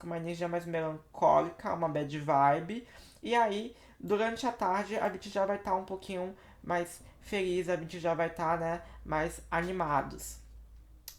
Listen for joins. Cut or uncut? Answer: uncut